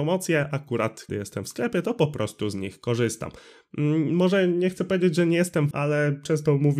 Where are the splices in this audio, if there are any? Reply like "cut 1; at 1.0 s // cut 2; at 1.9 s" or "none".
cut 1; at 1.1 s // cut 2; at 5.7 s